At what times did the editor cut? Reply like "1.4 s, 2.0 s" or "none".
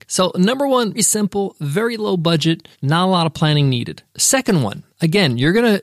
0.9 s, 2.7 s, 4.1 s